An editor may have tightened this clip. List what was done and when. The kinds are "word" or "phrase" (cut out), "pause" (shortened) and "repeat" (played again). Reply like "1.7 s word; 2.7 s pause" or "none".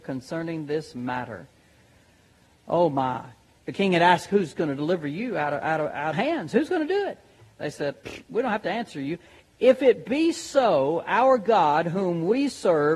6.1 s phrase

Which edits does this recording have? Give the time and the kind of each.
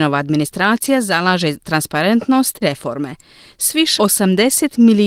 1.6 s word; 2.6 s word; 4.0 s word

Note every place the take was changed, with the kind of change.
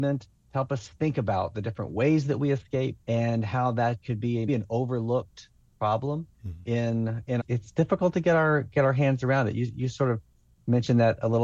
3.0 s pause; 4.5 s word; 6.3 s pause; 7.4 s phrase

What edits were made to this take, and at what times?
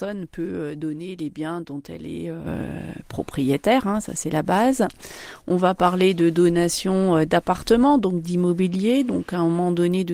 none

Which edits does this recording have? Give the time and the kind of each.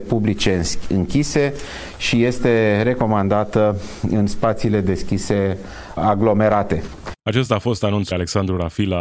6.0 s word; 7.2 s pause; 8.1 s word

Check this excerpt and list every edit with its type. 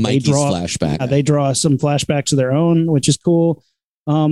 1.0 s word

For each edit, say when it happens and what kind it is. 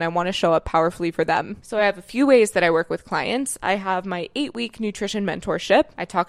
none

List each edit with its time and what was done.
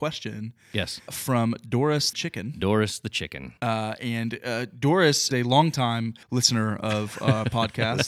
1.1 s word; 2.1 s word; 3.6 s pause; 5.3 s word; 6.2 s pause

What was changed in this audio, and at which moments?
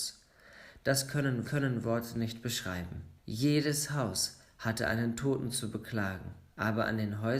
1.4 s repeat; 3.2 s pause; 6.5 s pause

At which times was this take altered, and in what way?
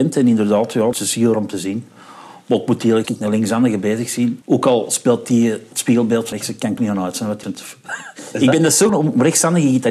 0.9 s word; 1.3 s word; 3.0 s phrase; 4.4 s pause; 6.3 s word; 6.8 s word; 7.4 s word; 8.9 s word

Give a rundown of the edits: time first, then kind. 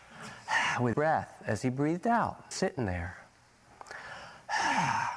0.9 s word; 2.5 s word

